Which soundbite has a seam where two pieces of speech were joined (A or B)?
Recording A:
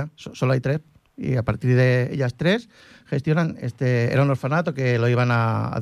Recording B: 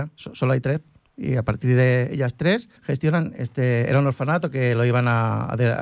B